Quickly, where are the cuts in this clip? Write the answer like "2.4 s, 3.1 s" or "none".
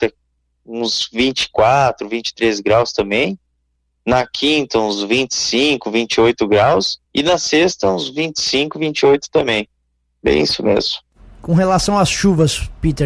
7.0 s